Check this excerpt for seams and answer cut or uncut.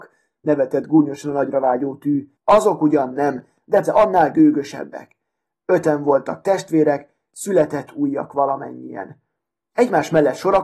cut